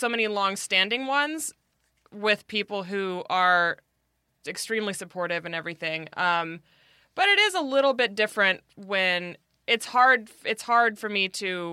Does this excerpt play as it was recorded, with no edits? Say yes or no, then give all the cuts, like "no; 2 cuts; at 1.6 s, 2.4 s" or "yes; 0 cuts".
no; 1 cut; at 4.4 s